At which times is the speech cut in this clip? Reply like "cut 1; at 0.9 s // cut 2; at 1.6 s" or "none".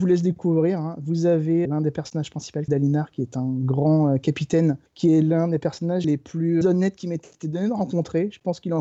cut 1; at 1.7 s // cut 2; at 2.7 s // cut 3; at 4.9 s // cut 4; at 6.0 s // cut 5; at 6.6 s

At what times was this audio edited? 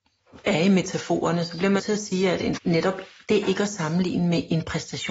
cut 1; at 1.8 s // cut 2; at 2.6 s // cut 3; at 3.4 s

